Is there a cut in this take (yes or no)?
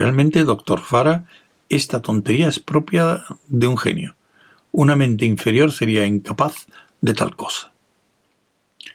no